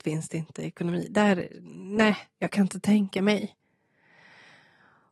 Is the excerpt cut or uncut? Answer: uncut